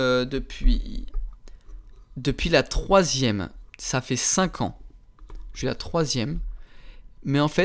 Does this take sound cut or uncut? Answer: cut